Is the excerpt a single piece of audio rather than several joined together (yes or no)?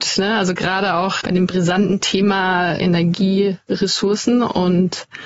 no